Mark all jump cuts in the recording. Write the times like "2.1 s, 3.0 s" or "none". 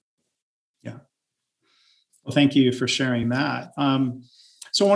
none